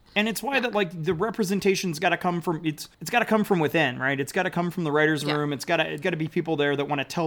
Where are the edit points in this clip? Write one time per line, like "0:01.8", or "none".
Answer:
0:02.9
0:06.0